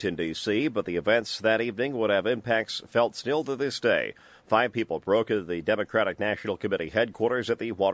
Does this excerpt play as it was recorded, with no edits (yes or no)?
yes